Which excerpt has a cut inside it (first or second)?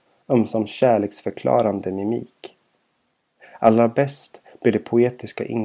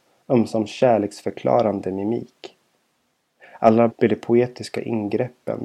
second